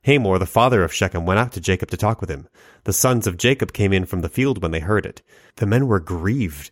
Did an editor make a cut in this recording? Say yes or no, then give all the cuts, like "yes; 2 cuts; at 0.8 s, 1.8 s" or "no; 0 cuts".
no; 0 cuts